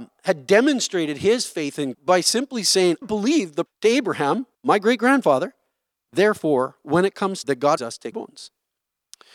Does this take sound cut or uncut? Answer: cut